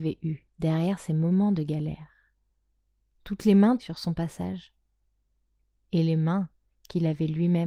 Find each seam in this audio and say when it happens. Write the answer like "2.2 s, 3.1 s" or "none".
3.8 s